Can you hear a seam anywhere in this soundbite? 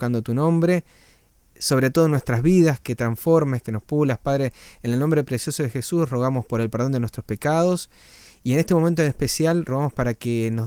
no; 0 cuts

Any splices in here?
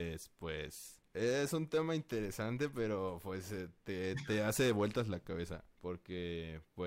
yes; 2 cuts; at 1.1 s, 5.7 s

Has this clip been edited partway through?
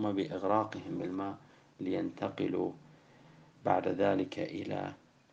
no; 0 cuts

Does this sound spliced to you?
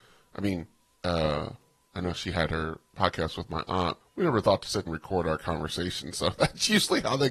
yes; 2 cuts; at 4.0 s, 4.9 s

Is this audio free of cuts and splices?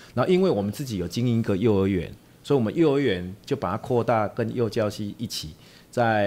yes; 0 cuts

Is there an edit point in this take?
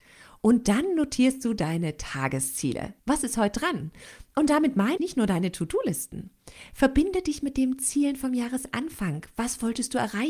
yes; 2 cuts; at 3.0 s, 5.0 s

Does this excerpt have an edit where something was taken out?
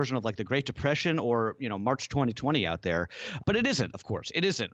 yes; 1 cut; at 3.4 s

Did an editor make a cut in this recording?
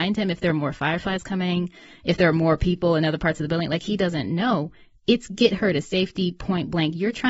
no; 0 cuts

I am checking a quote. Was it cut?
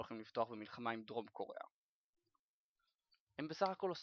no; 0 cuts

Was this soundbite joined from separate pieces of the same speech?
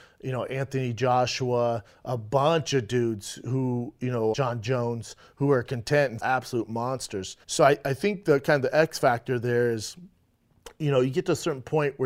yes; 3 cuts; at 4.3 s, 6.2 s, 7.4 s

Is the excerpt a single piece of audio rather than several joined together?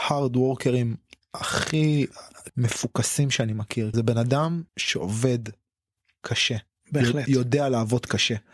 no; 3 cuts; at 2.5 s, 3.9 s, 4.7 s

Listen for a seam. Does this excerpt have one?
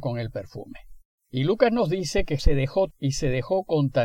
yes; 3 cuts; at 1.2 s, 2.4 s, 2.9 s

